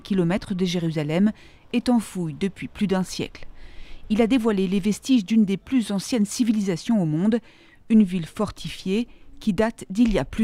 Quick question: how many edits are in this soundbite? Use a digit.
0